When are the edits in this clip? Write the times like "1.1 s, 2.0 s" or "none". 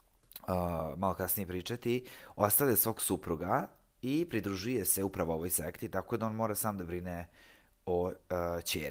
none